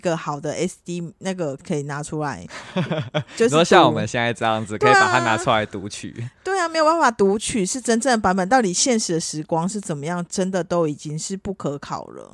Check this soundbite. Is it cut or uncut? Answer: cut